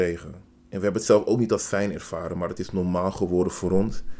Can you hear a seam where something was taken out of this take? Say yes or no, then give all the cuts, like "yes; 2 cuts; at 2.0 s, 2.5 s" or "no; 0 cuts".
no; 0 cuts